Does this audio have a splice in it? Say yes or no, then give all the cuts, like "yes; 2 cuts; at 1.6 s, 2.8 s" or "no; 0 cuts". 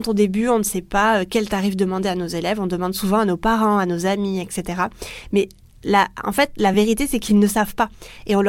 no; 0 cuts